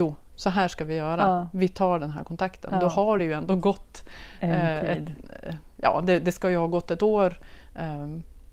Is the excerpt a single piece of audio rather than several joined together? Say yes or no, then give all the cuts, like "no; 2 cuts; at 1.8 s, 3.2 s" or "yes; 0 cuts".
yes; 0 cuts